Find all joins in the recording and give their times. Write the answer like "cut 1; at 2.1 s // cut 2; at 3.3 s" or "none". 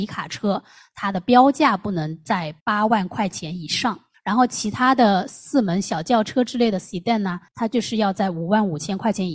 cut 1; at 2.6 s // cut 2; at 4.1 s // cut 3; at 7.5 s

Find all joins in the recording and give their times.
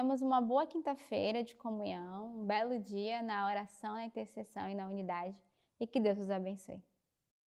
none

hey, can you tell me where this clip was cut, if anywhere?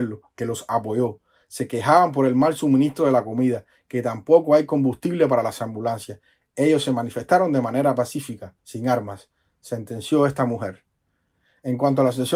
none

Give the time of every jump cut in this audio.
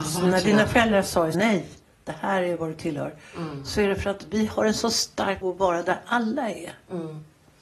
cut 1; at 1.3 s // cut 2; at 5.4 s

